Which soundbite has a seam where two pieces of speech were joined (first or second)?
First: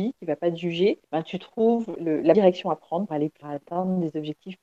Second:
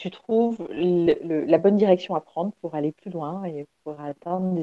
first